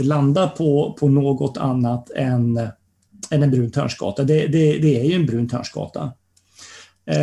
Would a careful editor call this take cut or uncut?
uncut